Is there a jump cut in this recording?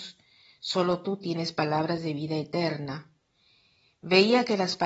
no; 0 cuts

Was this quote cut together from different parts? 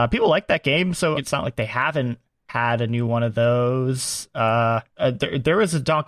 yes; 3 cuts; at 1.2 s, 2.3 s, 4.9 s

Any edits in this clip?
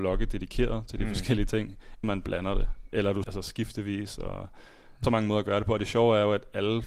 yes; 3 cuts; at 2.0 s, 3.2 s, 5.0 s

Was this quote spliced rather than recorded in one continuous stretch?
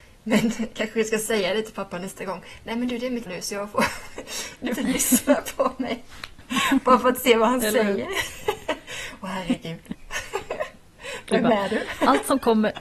yes; 2 cuts; at 3.3 s, 4.7 s

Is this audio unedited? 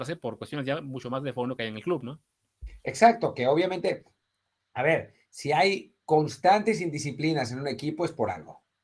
no; 1 cut; at 6.0 s

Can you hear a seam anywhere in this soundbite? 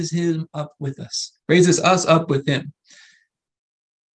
yes; 1 cut; at 1.4 s

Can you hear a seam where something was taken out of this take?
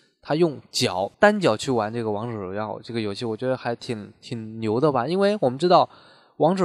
yes; 1 cut; at 1.1 s

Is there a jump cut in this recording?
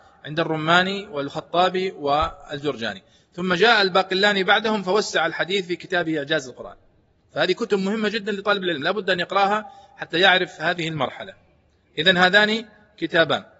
no; 0 cuts

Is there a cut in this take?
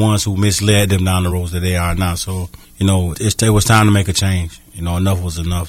yes; 3 cuts; at 1.3 s, 2.6 s, 3.1 s

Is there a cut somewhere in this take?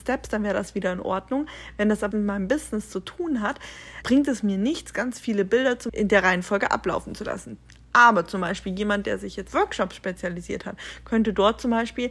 yes; 4 cuts; at 2.1 s, 4.0 s, 5.9 s, 9.5 s

